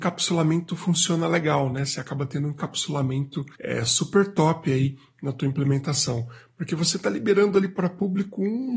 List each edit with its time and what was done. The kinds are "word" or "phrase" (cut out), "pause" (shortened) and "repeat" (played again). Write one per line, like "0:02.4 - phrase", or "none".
0:03.5 - pause